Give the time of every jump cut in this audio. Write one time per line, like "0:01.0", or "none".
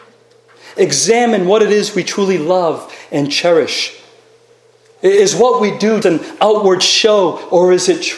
0:06.0

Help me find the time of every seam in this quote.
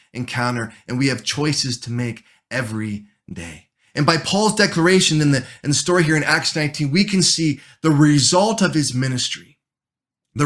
none

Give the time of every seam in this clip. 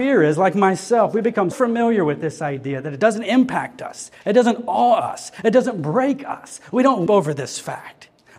0:01.5
0:07.1

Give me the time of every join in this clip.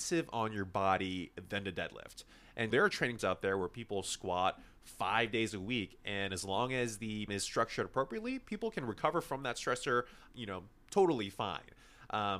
0:02.7
0:03.2
0:07.3
0:10.3

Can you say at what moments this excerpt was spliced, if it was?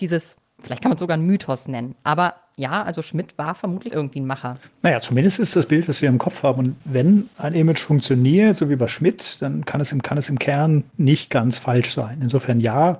0:03.9
0:04.6
0:05.5
0:10.0

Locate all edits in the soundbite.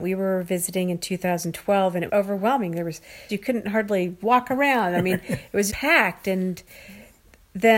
0:02.1
0:03.3
0:05.7

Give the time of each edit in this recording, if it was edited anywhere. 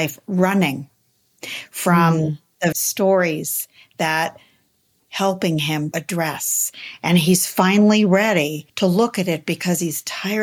0:02.7
0:05.0
0:05.9
0:08.7

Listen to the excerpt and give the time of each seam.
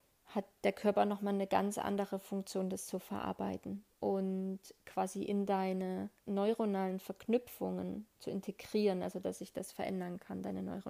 0:03.9
0:06.2

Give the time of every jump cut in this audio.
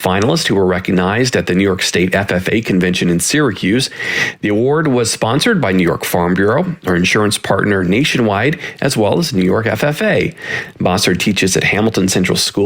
none

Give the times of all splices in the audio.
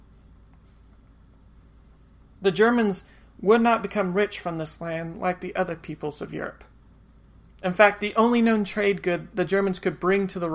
none

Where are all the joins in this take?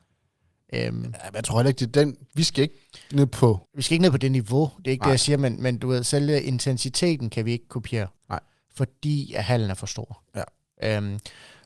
0:03.7
0:08.2

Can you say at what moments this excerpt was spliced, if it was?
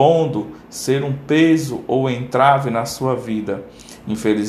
none

